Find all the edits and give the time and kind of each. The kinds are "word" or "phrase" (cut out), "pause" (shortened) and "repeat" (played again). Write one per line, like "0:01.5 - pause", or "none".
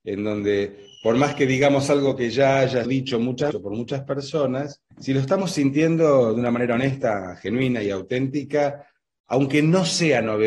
0:02.8 - word
0:03.5 - word
0:04.9 - pause